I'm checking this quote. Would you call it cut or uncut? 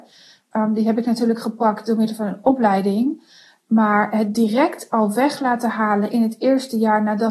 uncut